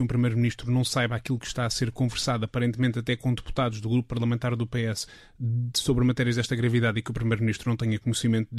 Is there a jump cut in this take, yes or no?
no